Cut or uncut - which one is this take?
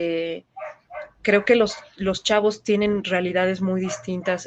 uncut